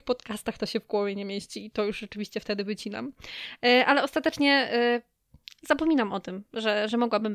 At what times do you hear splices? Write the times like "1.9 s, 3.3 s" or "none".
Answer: none

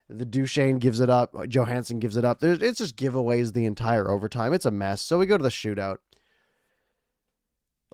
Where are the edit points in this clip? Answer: none

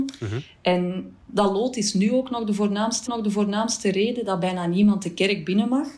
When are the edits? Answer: 3.1 s

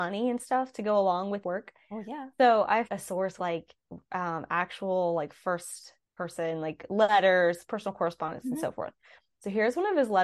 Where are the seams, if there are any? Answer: 1.4 s, 2.8 s, 3.4 s, 6.0 s

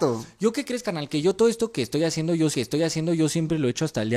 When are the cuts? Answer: 2.5 s

